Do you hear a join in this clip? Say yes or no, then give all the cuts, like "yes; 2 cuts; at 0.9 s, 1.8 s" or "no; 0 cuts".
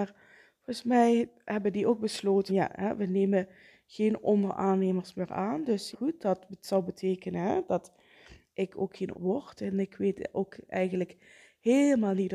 yes; 3 cuts; at 2.5 s, 5.9 s, 9.1 s